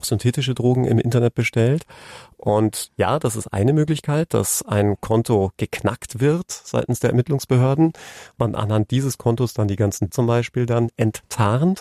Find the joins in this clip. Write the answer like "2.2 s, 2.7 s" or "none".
8.4 s, 10.1 s